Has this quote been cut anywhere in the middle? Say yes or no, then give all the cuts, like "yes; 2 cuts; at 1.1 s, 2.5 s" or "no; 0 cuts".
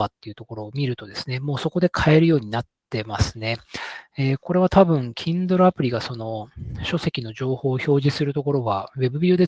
no; 0 cuts